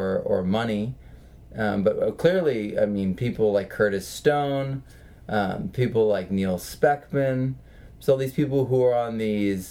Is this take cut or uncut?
uncut